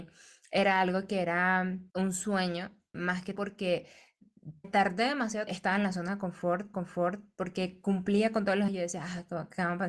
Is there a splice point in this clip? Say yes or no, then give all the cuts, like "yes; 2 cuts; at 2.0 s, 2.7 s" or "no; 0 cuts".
yes; 7 cuts; at 1.9 s, 2.9 s, 3.4 s, 4.6 s, 5.5 s, 6.7 s, 8.7 s